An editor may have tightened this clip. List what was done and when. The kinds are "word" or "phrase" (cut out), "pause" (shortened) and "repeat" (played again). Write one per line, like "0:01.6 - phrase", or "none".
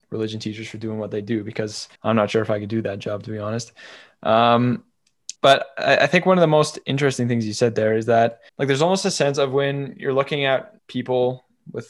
0:02.0 - pause
0:05.4 - pause
0:08.5 - pause
0:10.8 - pause